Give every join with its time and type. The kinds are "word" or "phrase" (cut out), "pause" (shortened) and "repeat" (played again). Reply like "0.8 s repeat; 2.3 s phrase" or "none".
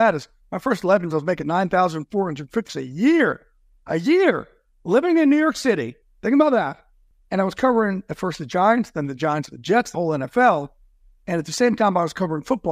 1.1 s word; 2.7 s word; 9.9 s word